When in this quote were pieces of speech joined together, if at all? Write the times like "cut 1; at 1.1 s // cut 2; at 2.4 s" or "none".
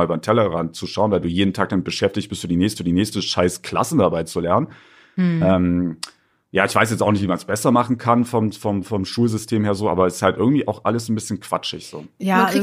cut 1; at 2.8 s